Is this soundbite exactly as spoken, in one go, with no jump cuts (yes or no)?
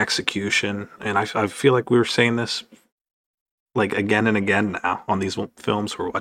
yes